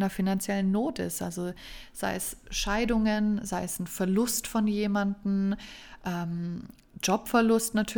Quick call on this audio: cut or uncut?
uncut